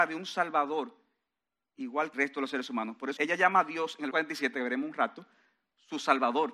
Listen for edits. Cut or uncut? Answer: cut